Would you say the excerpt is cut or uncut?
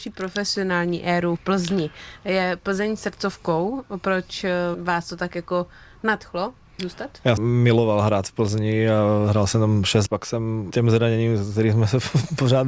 cut